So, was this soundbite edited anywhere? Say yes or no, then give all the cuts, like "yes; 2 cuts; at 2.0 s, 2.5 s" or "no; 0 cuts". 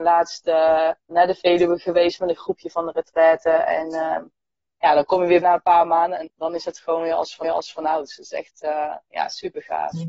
yes; 4 cuts; at 1.1 s, 5.4 s, 6.3 s, 7.4 s